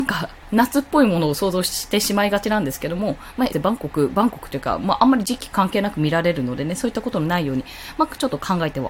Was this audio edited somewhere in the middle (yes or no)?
yes